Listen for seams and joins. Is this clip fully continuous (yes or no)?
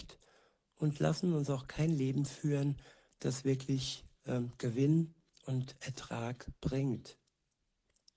yes